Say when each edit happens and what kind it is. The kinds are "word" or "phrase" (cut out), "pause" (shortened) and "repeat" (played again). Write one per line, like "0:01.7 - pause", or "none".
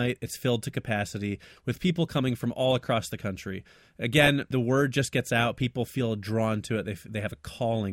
0:04.5 - word

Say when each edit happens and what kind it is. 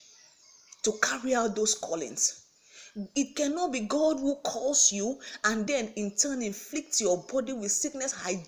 none

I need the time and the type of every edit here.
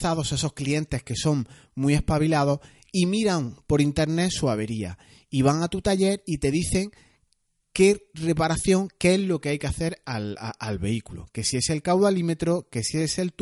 none

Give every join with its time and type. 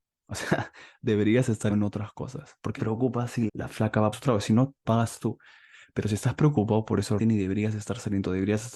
0:01.7 - word
0:02.8 - word
0:03.5 - word
0:04.1 - word
0:04.8 - word
0:07.2 - word

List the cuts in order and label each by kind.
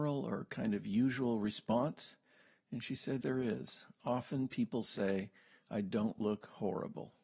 0:03.2 - word

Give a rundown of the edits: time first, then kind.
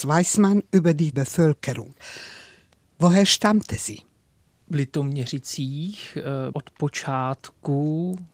0:01.1 - word
0:06.5 - word

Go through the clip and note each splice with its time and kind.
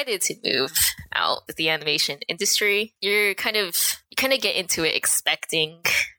0:01.5 - word

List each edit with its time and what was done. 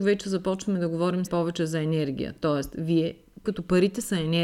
0:01.3 - word
0:03.5 - word

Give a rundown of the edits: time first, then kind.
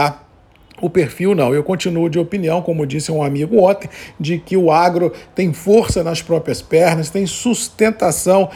none

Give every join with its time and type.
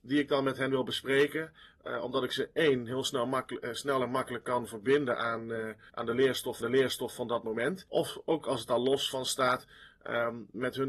0:06.6 - repeat

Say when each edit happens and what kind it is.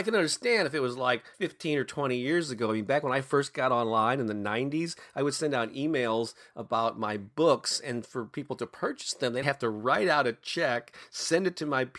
0:01.3 - pause
0:09.4 - word

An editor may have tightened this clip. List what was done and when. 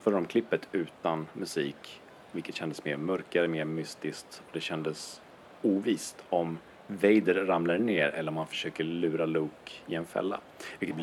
none

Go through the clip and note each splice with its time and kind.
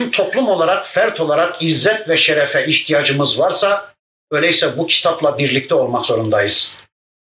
none

